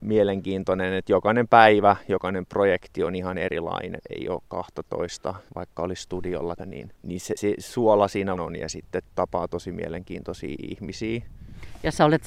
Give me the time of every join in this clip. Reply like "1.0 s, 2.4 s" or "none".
4.0 s, 5.5 s, 6.6 s, 6.9 s, 7.4 s, 8.4 s